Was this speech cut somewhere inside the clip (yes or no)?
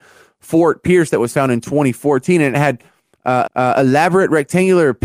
yes